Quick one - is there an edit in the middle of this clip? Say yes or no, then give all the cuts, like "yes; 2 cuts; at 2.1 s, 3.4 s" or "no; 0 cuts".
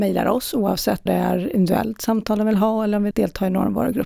yes; 2 cuts; at 1.1 s, 3.1 s